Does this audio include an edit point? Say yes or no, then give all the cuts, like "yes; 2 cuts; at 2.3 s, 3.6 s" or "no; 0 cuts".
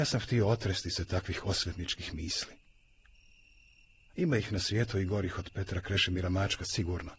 no; 0 cuts